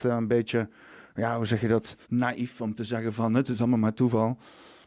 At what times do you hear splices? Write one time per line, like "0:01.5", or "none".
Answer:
0:02.0